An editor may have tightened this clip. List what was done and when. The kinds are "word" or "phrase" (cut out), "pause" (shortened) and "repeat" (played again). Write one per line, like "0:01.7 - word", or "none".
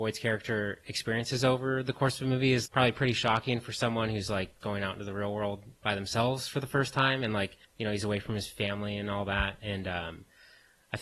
0:02.7 - word
0:04.6 - word
0:07.6 - pause